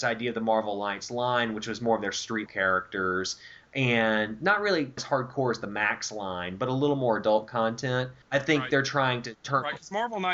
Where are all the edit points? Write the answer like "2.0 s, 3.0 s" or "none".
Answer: 2.5 s, 5.0 s, 8.2 s